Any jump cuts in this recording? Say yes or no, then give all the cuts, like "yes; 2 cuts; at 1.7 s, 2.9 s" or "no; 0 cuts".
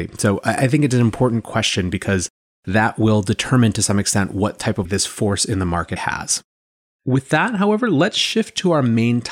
yes; 2 cuts; at 4.8 s, 6.0 s